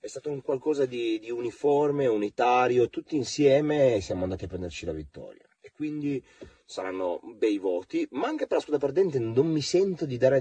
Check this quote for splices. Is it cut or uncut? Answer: uncut